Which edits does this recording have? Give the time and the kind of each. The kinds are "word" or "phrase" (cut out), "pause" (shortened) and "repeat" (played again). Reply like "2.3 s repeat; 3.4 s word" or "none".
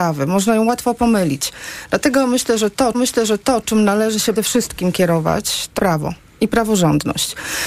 2.9 s repeat; 4.4 s word; 5.8 s word

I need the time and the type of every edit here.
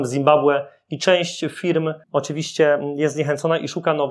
2.0 s pause

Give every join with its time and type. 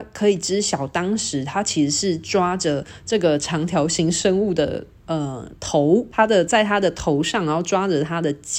6.1 s pause

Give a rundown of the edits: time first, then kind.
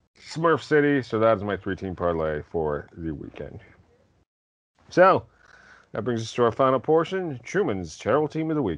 none

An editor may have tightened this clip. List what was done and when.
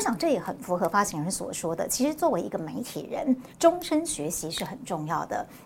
3.5 s pause

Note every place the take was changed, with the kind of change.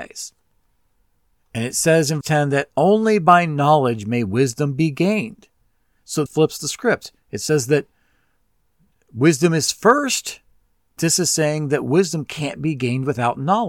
2.2 s word; 6.3 s word; 11.0 s word

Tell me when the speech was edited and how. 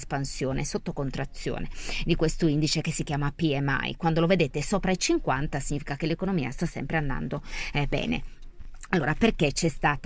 none

